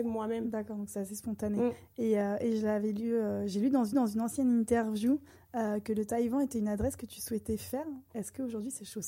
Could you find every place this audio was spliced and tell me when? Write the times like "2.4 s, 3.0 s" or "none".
3.9 s